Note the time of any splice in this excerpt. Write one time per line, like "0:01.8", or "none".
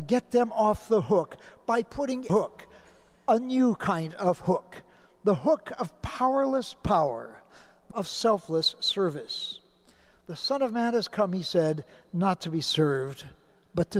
0:02.3
0:07.9